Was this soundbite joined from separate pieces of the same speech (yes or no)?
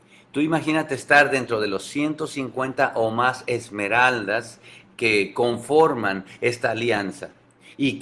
no